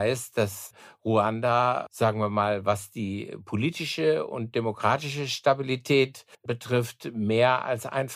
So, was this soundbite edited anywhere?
yes; 1 cut; at 6.3 s

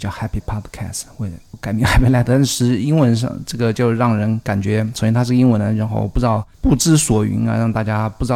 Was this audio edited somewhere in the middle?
no; 0 cuts

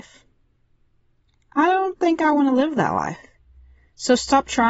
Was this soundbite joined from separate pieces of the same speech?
no; 0 cuts

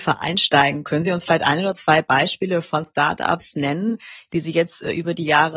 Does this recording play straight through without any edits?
yes; 0 cuts

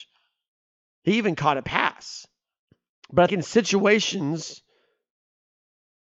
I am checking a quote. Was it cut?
yes; 2 cuts; at 2.7 s, 3.3 s

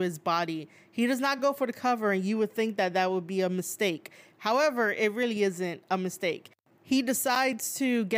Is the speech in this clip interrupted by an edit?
no; 0 cuts

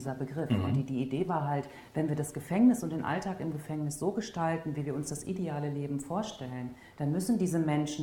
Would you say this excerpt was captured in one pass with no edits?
yes; 0 cuts

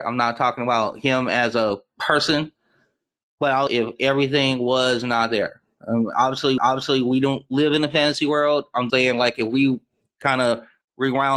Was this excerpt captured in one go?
no; 3 cuts; at 3.7 s, 6.6 s, 8.9 s

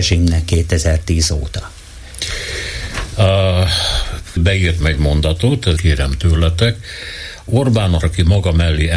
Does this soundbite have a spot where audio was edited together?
yes; 4 cuts; at 4.4 s, 4.8 s, 5.8 s, 8.0 s

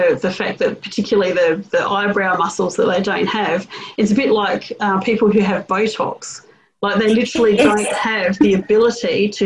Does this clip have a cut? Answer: no; 0 cuts

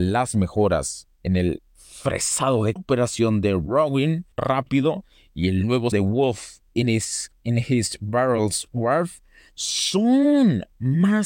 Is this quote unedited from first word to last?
no; 4 cuts; at 2.8 s, 4.3 s, 5.9 s, 6.7 s

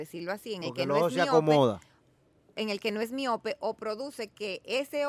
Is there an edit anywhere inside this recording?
no; 0 cuts

